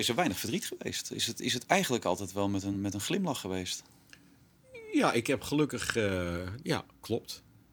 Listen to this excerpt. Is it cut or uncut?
uncut